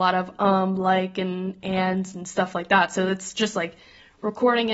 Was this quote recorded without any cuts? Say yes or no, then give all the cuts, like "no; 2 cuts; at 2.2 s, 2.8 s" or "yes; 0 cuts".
yes; 0 cuts